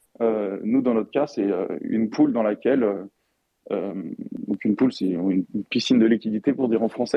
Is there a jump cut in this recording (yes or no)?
no